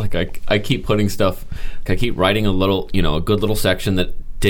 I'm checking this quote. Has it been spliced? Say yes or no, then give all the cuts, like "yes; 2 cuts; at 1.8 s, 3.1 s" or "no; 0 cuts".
yes; 1 cut; at 1.9 s